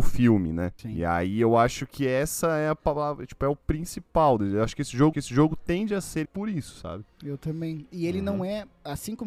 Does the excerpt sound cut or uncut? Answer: cut